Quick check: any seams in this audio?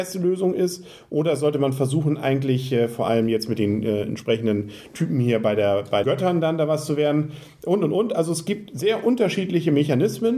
yes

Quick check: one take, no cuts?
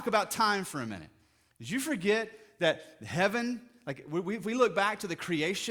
yes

